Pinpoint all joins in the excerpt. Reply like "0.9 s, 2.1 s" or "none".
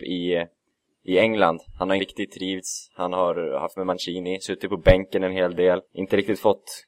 2.0 s, 3.8 s, 5.8 s